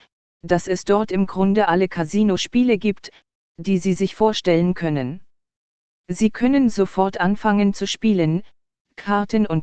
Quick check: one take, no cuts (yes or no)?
yes